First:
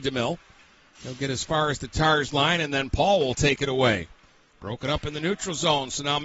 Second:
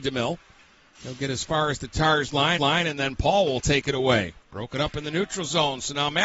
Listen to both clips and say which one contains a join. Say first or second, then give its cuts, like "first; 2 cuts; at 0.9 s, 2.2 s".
second; 2 cuts; at 2.6 s, 4.4 s